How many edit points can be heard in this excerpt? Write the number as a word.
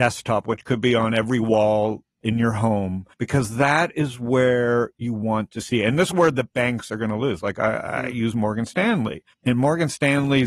three